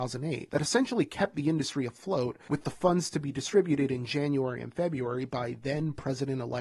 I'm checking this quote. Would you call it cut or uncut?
uncut